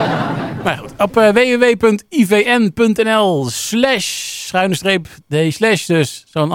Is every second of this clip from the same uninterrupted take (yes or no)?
yes